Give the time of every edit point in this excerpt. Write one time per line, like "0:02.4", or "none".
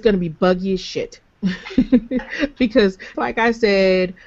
0:03.1